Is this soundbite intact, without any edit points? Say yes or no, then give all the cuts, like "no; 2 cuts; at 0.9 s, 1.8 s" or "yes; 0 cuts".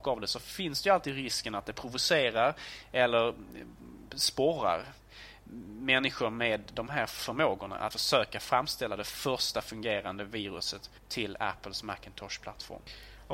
no; 2 cuts; at 7.9 s, 11.0 s